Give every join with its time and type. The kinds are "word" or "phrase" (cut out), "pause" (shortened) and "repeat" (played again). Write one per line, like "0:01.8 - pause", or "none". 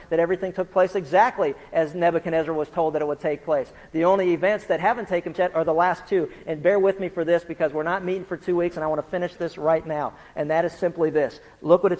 0:05.3 - word